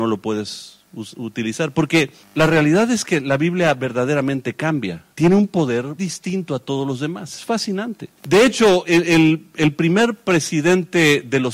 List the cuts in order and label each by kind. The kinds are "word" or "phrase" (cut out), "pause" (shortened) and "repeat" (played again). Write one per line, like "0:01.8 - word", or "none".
0:02.2 - pause
0:05.1 - pause
0:06.0 - word
0:08.2 - pause
0:08.9 - word